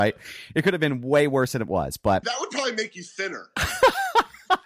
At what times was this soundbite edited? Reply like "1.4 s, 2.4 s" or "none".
2.2 s